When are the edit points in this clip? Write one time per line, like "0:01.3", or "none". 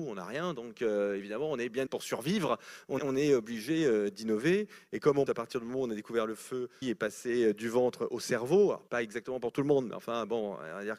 0:01.9
0:03.0
0:05.3
0:06.8
0:08.9